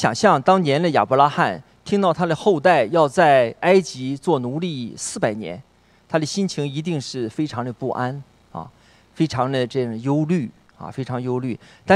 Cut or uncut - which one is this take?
uncut